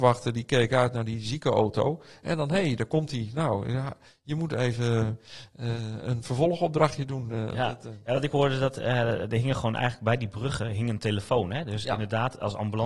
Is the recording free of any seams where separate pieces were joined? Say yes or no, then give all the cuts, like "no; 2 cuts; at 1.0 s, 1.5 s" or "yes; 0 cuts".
yes; 0 cuts